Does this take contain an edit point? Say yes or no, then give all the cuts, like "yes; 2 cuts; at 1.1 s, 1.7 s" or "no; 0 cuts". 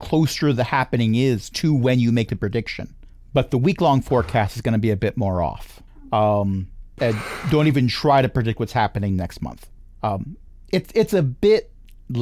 no; 0 cuts